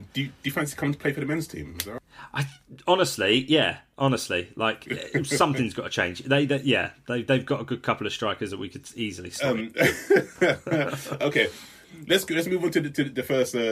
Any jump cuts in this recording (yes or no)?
no